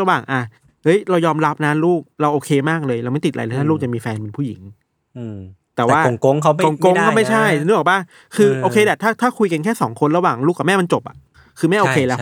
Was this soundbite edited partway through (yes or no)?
no